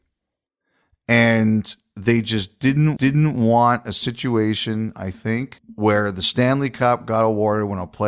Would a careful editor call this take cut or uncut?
cut